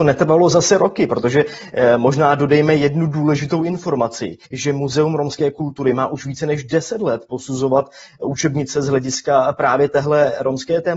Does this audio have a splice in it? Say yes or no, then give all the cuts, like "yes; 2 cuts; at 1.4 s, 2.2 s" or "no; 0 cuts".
yes; 1 cut; at 4.5 s